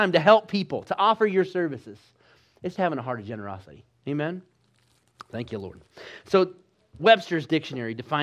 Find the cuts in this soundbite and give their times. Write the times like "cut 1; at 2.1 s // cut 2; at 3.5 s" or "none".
cut 1; at 2.7 s // cut 2; at 7.0 s